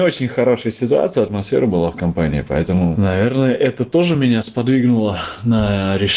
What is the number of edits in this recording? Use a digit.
0